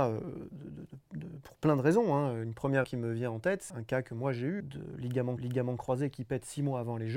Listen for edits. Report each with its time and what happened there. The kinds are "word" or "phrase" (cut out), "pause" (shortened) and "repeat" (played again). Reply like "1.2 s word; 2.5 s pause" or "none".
2.8 s word; 3.7 s word; 4.6 s word; 5.4 s repeat